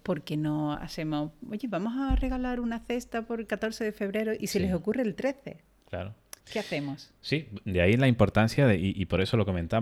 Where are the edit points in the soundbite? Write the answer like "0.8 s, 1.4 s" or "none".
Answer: 6.4 s, 7.2 s